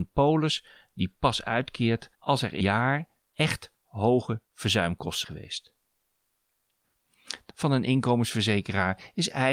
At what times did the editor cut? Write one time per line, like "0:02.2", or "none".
0:02.1
0:02.6
0:03.2
0:05.2
0:07.5

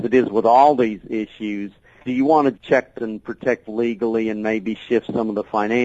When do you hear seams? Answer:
0:02.0
0:02.5
0:02.9
0:03.6

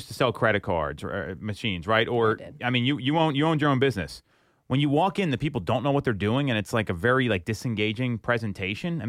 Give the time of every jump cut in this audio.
0:02.6

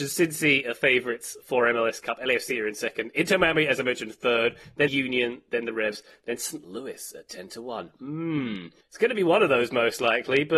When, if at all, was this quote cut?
0:04.9
0:08.8

